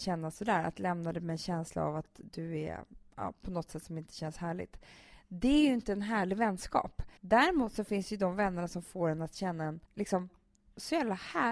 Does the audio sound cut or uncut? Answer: cut